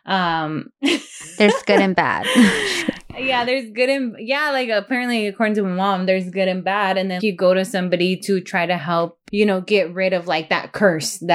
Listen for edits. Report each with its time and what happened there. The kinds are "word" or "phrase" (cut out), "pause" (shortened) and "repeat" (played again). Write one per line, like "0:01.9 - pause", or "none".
0:07.2 - word
0:09.3 - word